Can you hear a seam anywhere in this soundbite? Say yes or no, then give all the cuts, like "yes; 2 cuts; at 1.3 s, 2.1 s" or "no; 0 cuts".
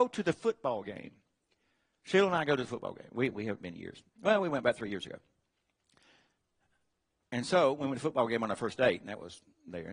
yes; 1 cut; at 4.1 s